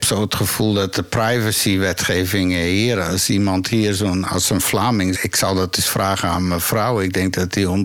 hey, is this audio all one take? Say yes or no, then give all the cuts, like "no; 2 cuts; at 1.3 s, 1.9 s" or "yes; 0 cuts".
no; 1 cut; at 5.1 s